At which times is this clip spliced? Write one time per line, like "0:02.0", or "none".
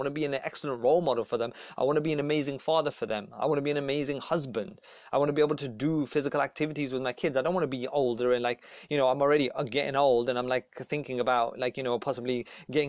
none